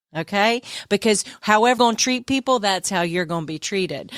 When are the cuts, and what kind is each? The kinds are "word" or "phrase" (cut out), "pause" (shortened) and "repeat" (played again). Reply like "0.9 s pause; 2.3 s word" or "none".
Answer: 1.8 s word